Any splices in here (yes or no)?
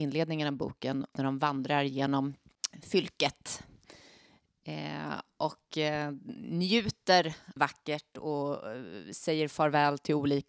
yes